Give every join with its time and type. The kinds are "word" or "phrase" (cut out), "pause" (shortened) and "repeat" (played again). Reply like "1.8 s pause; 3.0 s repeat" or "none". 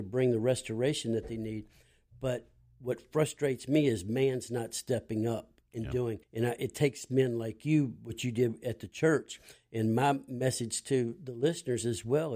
6.2 s pause

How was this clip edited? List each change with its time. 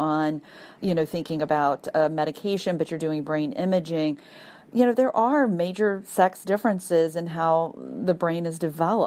none

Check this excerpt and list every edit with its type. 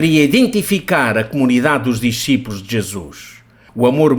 none

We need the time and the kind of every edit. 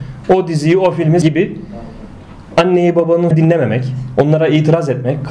1.2 s word; 3.3 s word

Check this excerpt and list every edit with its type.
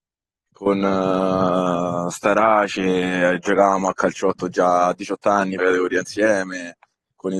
5.6 s phrase

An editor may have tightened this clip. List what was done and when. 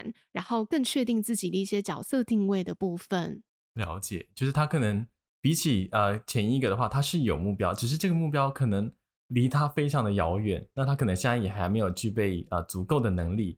none

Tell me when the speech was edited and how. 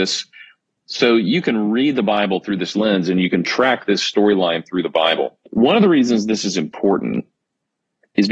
5.5 s pause

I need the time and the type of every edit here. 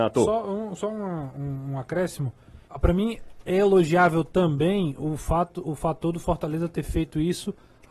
2.6 s pause

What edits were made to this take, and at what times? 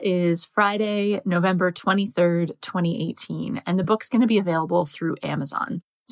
none

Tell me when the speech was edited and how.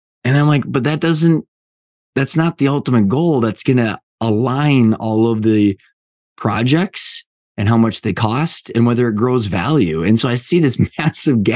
none

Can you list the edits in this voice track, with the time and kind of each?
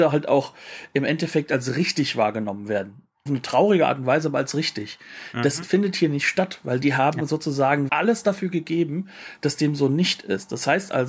3.3 s word; 7.9 s word

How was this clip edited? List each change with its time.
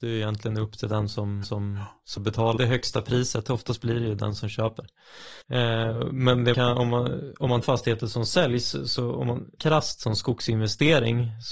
1.4 s repeat; 2.2 s word; 2.6 s word; 5.4 s pause; 6.5 s word; 7.6 s phrase; 9.6 s word

